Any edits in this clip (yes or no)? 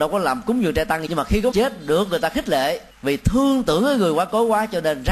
yes